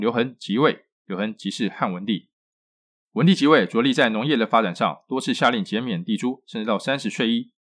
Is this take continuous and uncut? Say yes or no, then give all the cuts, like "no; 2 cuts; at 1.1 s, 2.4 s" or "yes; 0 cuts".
yes; 0 cuts